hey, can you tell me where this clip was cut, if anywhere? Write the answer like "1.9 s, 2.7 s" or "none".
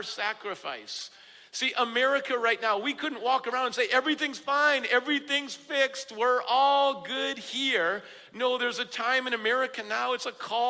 none